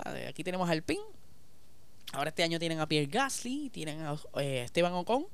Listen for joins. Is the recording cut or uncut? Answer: uncut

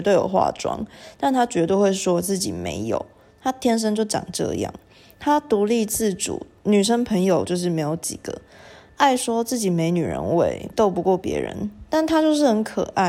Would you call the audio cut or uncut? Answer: cut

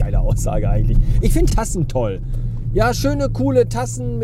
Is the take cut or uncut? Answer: cut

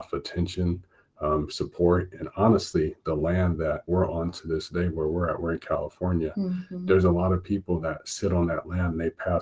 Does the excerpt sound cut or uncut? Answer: cut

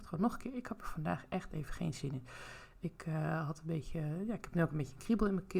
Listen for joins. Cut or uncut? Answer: uncut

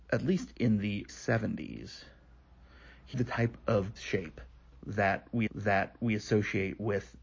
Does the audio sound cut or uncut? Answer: cut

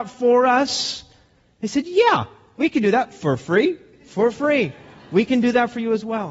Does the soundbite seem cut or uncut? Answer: uncut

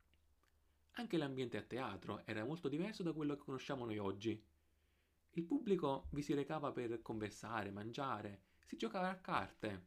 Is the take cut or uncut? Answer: uncut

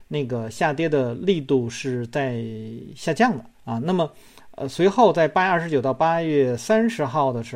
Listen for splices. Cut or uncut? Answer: cut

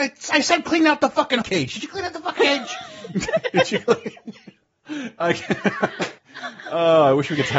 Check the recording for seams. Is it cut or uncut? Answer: cut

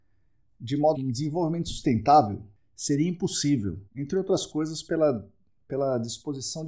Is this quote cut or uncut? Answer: cut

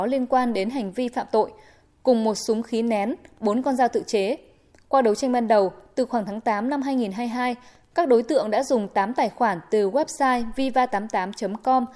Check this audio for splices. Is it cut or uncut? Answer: uncut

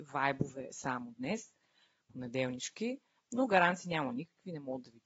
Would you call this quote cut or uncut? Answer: uncut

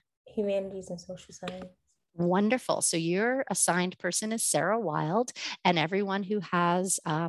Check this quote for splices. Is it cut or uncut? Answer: uncut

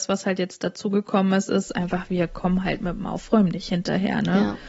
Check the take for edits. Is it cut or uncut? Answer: uncut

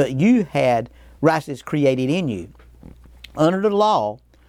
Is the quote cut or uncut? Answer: uncut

